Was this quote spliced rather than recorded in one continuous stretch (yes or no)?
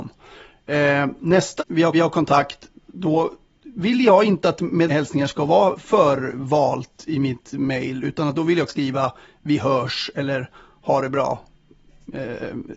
yes